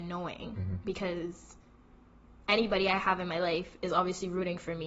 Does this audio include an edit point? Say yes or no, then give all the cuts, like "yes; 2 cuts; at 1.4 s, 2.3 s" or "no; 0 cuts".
no; 0 cuts